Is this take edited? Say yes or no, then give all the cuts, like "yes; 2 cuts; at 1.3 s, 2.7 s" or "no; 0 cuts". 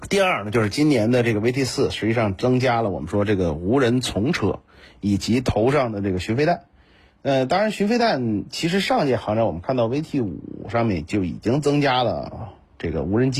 no; 0 cuts